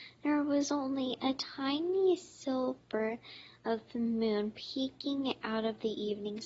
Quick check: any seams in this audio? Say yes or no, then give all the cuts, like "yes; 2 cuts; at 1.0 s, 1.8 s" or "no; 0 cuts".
no; 0 cuts